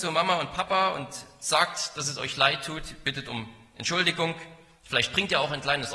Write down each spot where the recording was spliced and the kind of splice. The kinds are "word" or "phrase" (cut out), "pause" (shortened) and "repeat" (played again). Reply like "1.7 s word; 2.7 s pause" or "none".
none